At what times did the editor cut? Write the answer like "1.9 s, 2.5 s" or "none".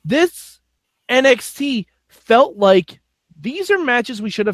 3.1 s